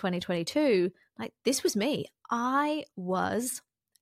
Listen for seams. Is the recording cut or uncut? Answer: uncut